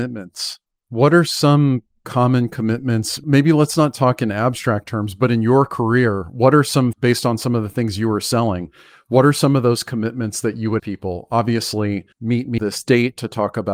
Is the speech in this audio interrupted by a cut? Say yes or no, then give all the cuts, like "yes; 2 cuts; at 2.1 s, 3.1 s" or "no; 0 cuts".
yes; 4 cuts; at 6.9 s, 10.8 s, 12.1 s, 12.6 s